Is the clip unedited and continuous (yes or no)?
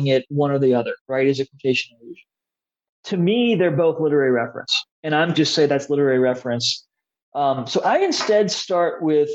no